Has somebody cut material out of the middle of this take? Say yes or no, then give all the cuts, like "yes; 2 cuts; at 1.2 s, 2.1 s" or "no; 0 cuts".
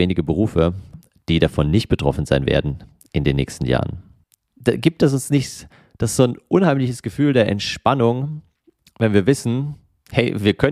no; 0 cuts